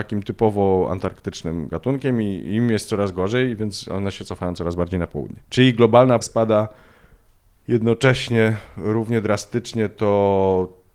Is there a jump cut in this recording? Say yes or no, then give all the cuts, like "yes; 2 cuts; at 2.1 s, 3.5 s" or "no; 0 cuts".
yes; 2 cuts; at 5.4 s, 6.2 s